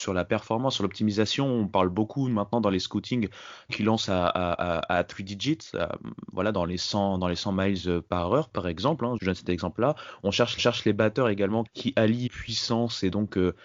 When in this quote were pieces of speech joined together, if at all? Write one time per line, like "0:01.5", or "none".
0:03.7
0:09.2
0:10.6
0:11.7
0:12.3